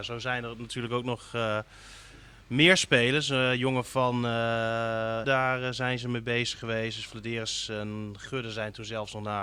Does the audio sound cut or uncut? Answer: cut